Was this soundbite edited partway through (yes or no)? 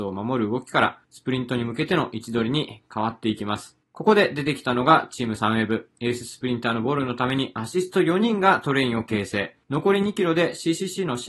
yes